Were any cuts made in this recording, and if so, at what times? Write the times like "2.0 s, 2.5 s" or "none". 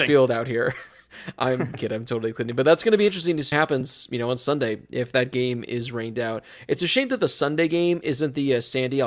1.7 s, 3.5 s